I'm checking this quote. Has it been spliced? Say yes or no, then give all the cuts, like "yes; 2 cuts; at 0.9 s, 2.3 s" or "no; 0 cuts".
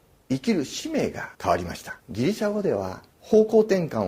yes; 3 cuts; at 1.3 s, 2.0 s, 3.1 s